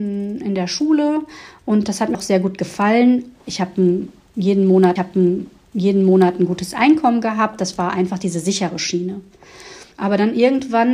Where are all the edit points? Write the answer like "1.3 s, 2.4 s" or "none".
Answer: 2.1 s, 5.0 s, 9.9 s